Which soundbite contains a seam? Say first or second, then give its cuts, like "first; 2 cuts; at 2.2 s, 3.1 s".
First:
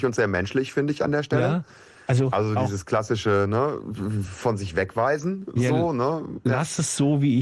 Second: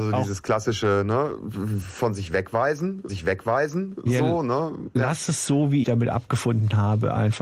second; 2 cuts; at 3.1 s, 5.8 s